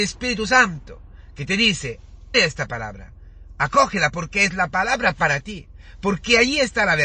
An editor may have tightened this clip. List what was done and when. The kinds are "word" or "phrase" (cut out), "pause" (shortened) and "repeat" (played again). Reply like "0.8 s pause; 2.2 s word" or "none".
2.3 s word